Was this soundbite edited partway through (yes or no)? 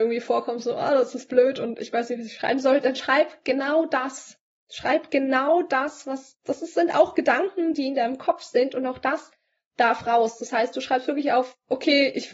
no